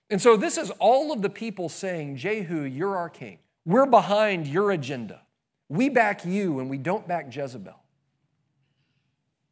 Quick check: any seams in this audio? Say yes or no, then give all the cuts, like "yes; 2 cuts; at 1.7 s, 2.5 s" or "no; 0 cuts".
yes; 1 cut; at 3.6 s